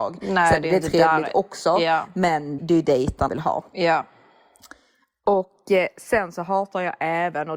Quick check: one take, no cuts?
no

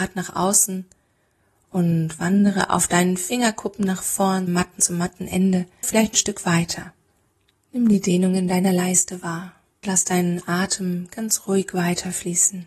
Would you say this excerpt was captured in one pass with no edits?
no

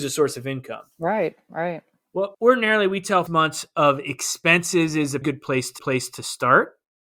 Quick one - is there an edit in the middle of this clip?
yes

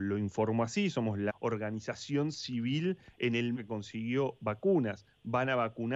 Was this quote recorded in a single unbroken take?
no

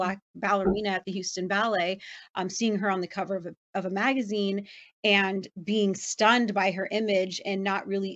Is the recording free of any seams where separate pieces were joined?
yes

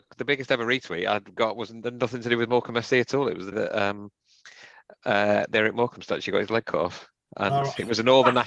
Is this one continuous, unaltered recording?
no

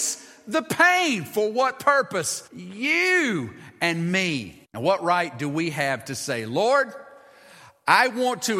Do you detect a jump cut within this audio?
yes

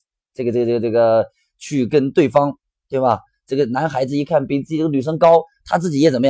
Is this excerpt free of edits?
yes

